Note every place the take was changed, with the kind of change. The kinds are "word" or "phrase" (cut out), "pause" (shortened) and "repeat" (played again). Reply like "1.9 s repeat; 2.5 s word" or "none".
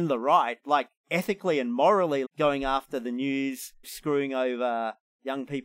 2.2 s word; 3.8 s word